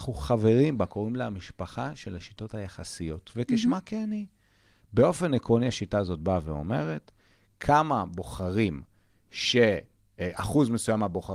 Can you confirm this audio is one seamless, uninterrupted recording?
yes; 0 cuts

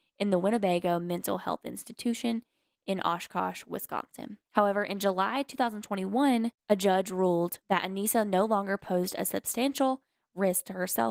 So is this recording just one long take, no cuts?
no; 3 cuts; at 4.4 s, 6.6 s, 7.6 s

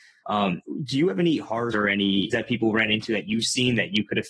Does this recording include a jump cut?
yes; 2 cuts; at 1.7 s, 2.3 s

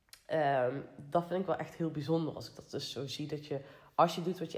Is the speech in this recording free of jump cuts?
yes; 0 cuts

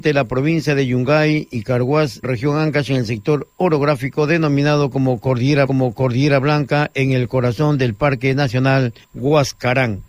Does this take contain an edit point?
yes; 3 cuts; at 2.2 s, 5.7 s, 9.0 s

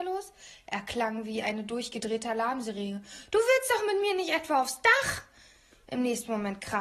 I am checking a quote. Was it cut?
no; 0 cuts

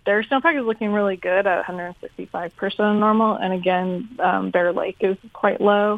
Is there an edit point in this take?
no; 0 cuts

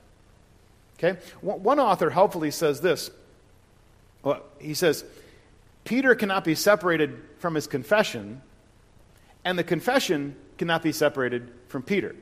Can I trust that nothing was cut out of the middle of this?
yes; 0 cuts

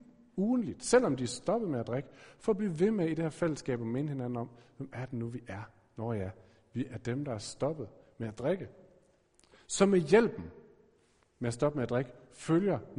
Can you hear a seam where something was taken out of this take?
no; 0 cuts

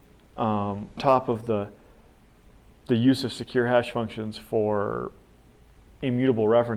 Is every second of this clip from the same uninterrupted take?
no; 1 cut; at 1.0 s

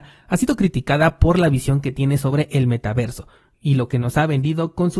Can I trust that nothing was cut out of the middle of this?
yes; 0 cuts

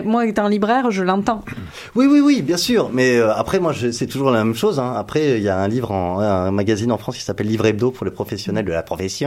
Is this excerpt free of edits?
yes; 0 cuts

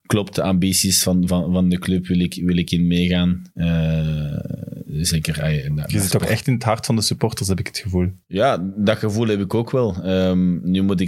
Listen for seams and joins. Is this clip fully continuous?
no; 1 cut; at 8.2 s

